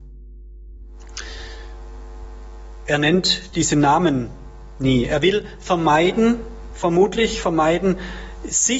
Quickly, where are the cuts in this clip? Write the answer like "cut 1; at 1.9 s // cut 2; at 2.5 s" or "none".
none